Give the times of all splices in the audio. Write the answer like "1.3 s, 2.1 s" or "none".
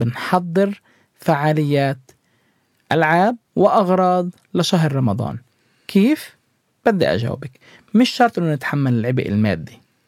3.5 s